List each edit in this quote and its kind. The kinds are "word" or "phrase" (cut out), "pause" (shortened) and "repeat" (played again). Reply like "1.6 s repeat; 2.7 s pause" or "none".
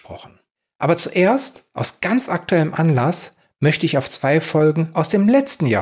none